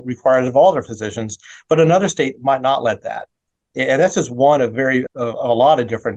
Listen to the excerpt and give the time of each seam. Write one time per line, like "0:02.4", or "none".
0:05.1